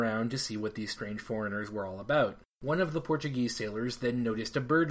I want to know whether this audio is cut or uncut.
cut